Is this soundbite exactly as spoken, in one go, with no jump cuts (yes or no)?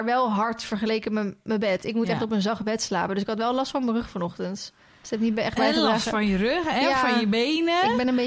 yes